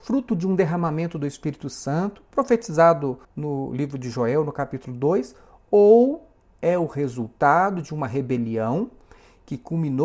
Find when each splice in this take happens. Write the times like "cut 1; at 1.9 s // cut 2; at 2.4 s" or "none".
cut 1; at 3.2 s